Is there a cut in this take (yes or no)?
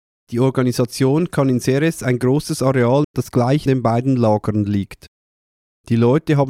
yes